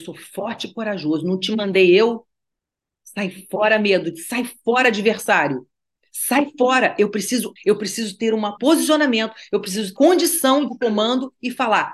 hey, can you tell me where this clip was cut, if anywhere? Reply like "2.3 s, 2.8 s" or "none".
7.6 s, 8.6 s, 10.0 s